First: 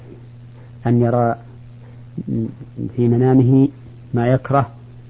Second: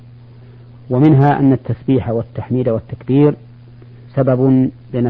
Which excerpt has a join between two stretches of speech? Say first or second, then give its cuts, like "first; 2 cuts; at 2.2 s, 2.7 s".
second; 1 cut; at 4.0 s